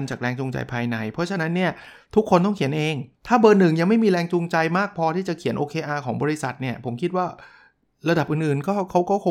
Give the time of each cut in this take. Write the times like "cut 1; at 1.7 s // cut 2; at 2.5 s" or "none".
cut 1; at 3.2 s